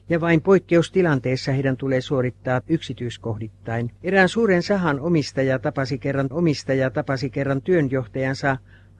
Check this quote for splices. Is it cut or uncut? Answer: cut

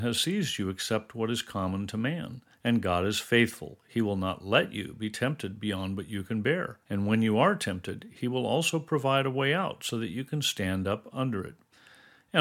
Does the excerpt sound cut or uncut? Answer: cut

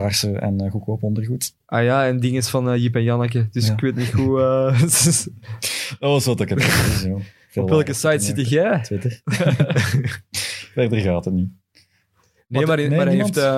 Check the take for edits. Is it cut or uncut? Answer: uncut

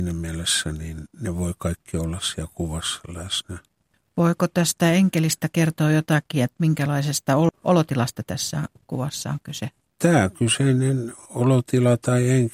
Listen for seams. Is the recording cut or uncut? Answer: uncut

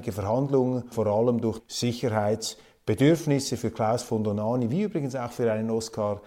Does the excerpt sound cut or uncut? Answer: cut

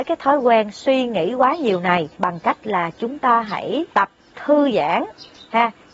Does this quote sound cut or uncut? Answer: cut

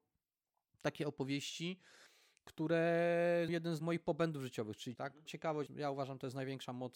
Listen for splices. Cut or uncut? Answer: cut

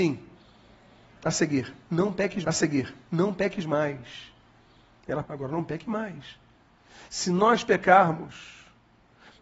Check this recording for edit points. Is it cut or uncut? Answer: cut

